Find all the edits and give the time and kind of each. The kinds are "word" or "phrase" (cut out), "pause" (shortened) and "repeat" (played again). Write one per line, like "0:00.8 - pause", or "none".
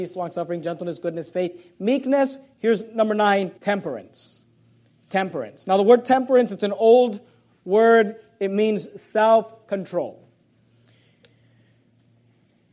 0:03.6 - pause